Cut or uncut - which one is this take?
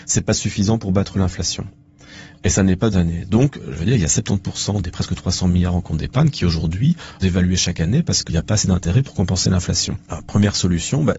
cut